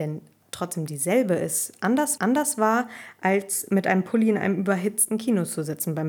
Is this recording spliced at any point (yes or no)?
yes